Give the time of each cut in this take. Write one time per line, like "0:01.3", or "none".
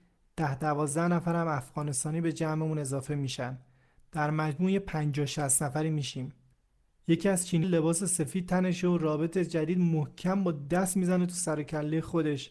0:07.6